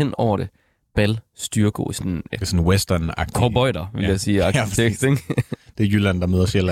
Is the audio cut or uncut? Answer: cut